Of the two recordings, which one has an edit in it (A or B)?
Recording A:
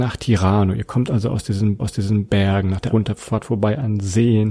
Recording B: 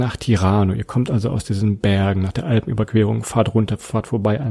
A